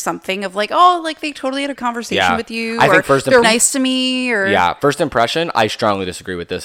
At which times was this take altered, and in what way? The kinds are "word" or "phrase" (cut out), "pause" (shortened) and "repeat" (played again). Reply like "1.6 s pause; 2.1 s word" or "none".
1.8 s word; 3.4 s word